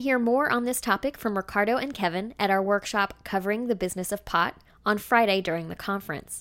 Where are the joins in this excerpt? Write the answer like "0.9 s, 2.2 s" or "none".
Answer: none